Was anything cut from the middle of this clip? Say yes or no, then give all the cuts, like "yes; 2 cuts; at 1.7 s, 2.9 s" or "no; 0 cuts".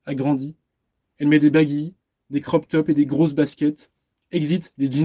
no; 0 cuts